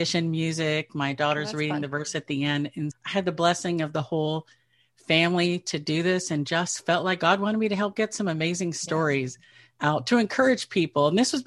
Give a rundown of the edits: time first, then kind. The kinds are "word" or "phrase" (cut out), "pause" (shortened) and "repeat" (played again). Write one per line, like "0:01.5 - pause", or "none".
0:02.9 - word